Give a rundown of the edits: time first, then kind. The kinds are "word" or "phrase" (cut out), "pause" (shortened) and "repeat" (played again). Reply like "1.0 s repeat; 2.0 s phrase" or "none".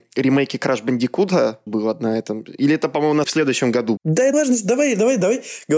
1.7 s word; 3.2 s word; 4.0 s word; 4.3 s word